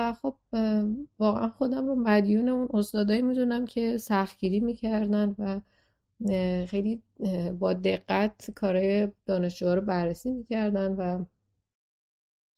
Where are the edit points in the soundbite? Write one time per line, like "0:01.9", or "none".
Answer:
0:09.2